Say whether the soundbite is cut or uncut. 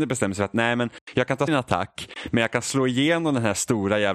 cut